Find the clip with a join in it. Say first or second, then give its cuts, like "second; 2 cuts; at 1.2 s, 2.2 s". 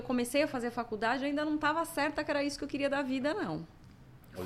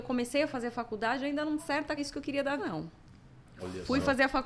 second; 3 cuts; at 1.6 s, 2.0 s, 2.6 s